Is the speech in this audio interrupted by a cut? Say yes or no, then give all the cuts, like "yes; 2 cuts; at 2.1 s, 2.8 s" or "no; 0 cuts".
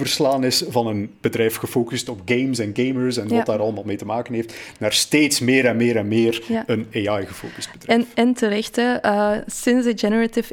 no; 0 cuts